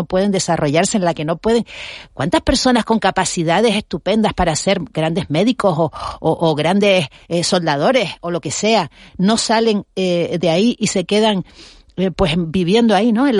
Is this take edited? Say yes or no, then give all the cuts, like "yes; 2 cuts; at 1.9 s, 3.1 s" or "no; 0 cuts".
no; 0 cuts